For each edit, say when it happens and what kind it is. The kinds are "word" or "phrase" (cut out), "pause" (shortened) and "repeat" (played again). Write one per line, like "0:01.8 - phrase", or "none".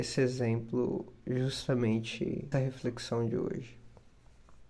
0:02.5 - word